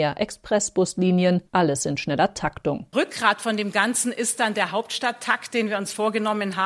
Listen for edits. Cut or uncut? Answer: cut